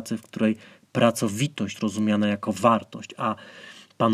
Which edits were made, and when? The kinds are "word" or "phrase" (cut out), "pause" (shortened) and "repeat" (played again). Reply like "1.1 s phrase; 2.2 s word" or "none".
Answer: 1.7 s word

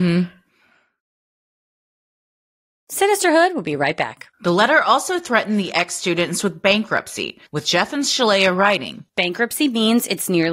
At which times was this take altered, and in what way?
4.3 s pause; 7.5 s pause; 9.1 s pause

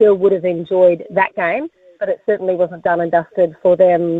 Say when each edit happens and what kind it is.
none

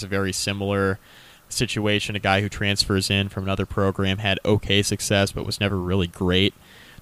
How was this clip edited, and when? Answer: none

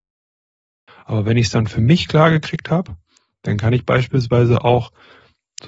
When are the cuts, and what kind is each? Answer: none

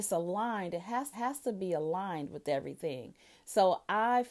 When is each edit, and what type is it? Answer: 1.1 s repeat

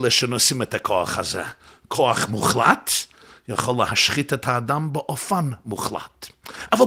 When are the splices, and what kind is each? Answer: none

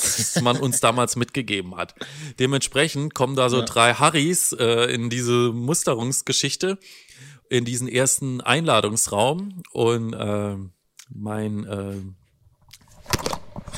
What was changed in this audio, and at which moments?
none

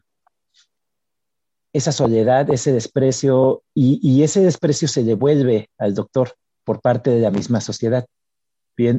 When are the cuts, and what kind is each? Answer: 6.4 s pause

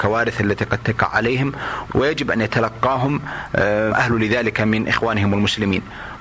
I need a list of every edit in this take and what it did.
1.9 s word; 3.9 s phrase

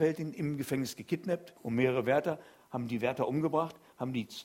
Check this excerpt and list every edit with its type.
1.6 s pause

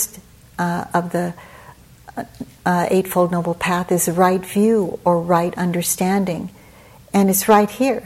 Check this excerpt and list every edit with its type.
none

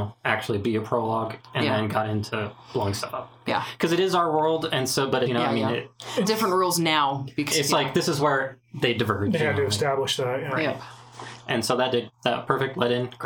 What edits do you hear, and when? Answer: 5.3 s phrase; 6.2 s word; 7.5 s word

